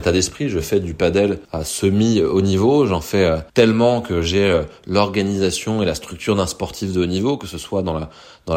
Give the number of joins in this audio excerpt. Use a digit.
2